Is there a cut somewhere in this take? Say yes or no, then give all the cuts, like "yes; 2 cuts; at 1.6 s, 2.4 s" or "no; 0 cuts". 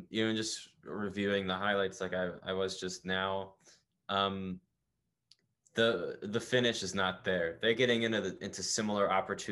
no; 0 cuts